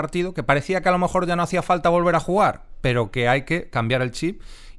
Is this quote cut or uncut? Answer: uncut